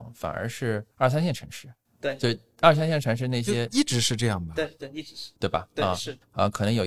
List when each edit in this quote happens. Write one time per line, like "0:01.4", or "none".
0:00.9
0:01.9
0:05.4